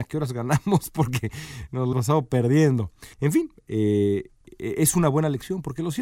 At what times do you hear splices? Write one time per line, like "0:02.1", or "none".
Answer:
0:01.9
0:03.1